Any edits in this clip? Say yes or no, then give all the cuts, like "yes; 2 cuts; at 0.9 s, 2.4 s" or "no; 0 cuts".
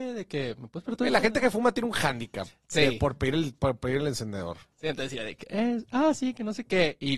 no; 0 cuts